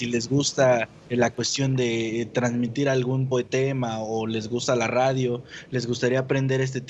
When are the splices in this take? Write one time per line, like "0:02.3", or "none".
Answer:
0:03.3